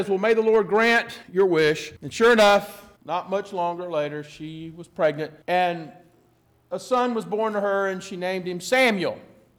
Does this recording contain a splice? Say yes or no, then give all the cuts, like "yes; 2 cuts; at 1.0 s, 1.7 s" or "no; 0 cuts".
yes; 4 cuts; at 1.2 s, 2.0 s, 3.0 s, 5.4 s